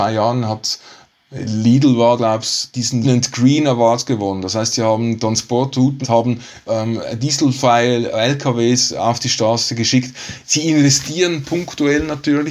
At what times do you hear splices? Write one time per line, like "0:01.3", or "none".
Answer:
0:01.1
0:02.2
0:03.0
0:06.0
0:06.7